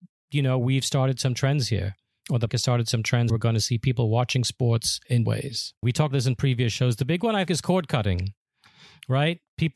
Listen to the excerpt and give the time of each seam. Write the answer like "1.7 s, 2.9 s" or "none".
2.5 s, 3.3 s, 5.2 s, 6.1 s, 7.5 s

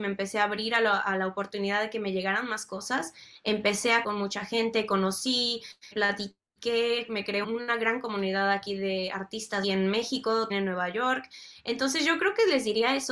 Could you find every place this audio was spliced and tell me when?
4.0 s, 5.9 s, 7.4 s, 9.6 s, 10.5 s

